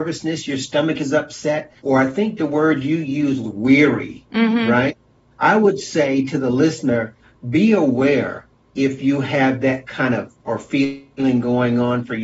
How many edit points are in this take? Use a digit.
3